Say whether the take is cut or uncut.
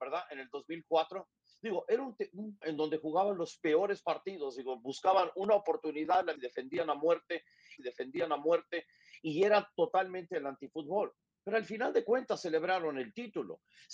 cut